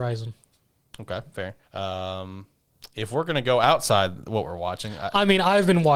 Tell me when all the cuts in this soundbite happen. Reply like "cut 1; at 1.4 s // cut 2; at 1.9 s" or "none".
cut 1; at 1.6 s